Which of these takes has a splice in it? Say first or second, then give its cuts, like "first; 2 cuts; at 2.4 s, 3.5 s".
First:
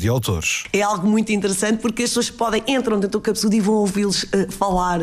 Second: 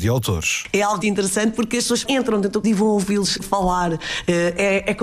second; 4 cuts; at 1.0 s, 2.0 s, 2.6 s, 3.4 s